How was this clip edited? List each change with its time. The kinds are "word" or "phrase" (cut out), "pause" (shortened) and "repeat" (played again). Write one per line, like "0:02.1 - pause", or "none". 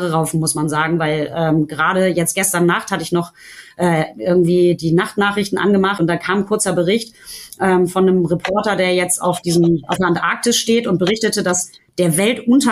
none